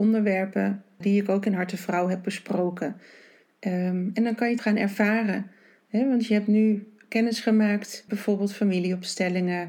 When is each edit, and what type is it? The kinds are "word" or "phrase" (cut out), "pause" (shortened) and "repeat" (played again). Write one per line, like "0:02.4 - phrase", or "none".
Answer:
0:01.0 - word
0:04.6 - word
0:08.1 - word